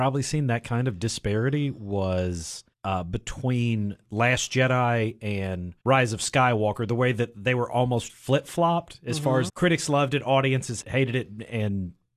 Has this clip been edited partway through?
yes; 5 cuts; at 2.7 s, 5.8 s, 8.1 s, 9.5 s, 10.8 s

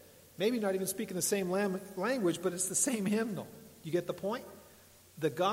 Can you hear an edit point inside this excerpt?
no; 0 cuts

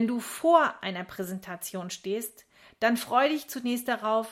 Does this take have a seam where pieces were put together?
no; 0 cuts

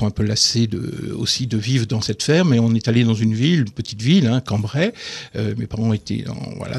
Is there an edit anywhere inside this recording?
no; 0 cuts

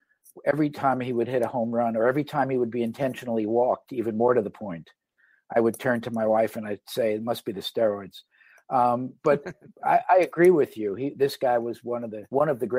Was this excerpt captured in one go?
yes; 0 cuts

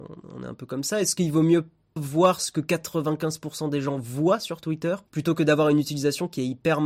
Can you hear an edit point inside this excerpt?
yes; 2 cuts; at 2.0 s, 5.1 s

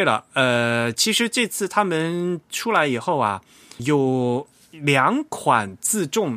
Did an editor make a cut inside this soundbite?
yes; 1 cut; at 3.8 s

